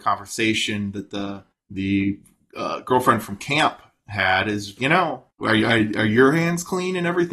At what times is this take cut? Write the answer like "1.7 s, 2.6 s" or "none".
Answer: 1.5 s, 4.8 s, 5.3 s